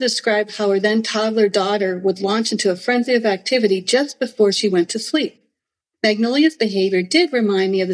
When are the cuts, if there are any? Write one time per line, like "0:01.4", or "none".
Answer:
none